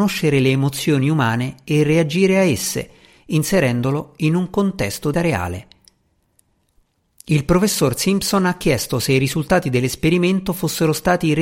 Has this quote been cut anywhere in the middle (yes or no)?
yes